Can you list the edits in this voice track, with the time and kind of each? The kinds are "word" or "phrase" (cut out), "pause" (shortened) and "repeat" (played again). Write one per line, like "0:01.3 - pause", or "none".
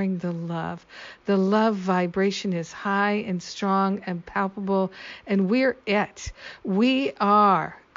none

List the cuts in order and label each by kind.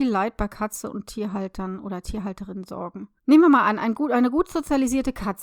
0:03.2 - pause

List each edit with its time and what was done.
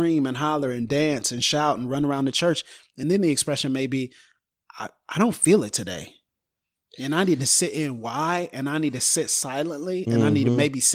none

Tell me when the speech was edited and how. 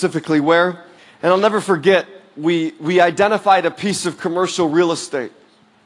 0:01.0 - pause

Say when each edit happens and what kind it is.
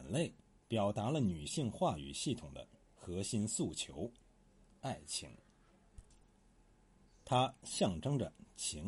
none

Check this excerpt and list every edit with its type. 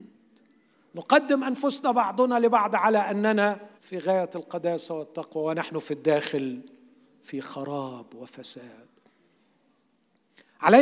0:03.8 - pause

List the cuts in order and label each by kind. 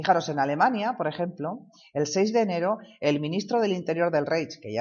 none

